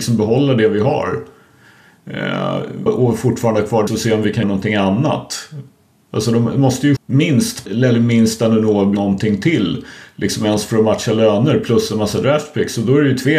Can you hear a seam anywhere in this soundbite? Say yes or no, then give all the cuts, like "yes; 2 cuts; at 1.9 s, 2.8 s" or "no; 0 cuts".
yes; 6 cuts; at 2.9 s, 3.9 s, 4.4 s, 7.0 s, 7.7 s, 8.9 s